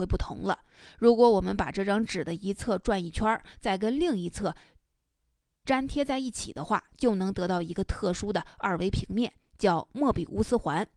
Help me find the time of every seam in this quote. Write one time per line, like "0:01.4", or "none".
none